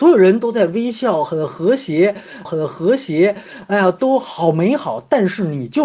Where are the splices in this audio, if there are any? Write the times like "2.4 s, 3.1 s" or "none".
2.4 s